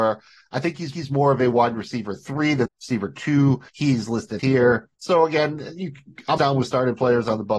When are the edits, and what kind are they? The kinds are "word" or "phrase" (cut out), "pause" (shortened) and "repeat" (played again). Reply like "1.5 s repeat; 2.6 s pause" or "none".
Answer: 0.9 s repeat; 2.7 s phrase; 3.7 s pause; 4.4 s word; 5.0 s pause; 6.4 s word